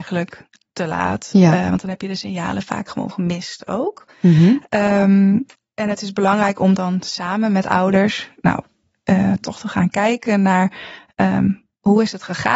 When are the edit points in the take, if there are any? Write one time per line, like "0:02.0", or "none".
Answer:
none